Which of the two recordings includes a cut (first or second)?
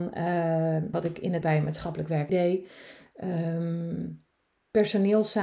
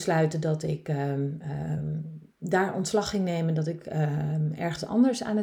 first